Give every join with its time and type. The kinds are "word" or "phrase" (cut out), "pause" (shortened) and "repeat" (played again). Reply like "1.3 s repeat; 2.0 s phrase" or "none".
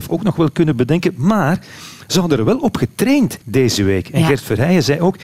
3.4 s pause